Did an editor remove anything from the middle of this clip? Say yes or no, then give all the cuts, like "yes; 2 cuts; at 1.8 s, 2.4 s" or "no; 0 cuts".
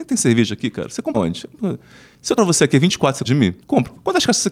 yes; 3 cuts; at 1.1 s, 2.4 s, 3.2 s